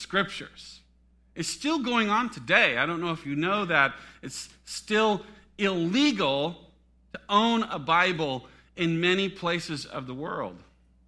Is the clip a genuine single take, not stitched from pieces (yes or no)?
yes